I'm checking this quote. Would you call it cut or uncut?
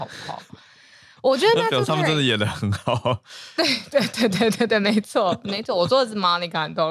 uncut